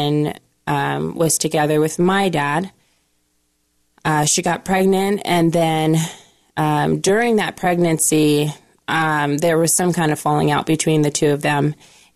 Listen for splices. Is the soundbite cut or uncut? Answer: uncut